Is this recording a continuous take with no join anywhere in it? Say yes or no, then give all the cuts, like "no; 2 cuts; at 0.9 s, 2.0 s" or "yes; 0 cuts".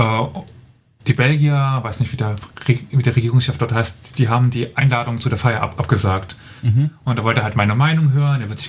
yes; 0 cuts